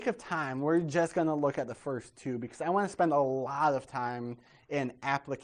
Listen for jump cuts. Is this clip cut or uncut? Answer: uncut